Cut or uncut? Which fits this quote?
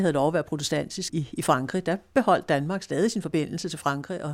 uncut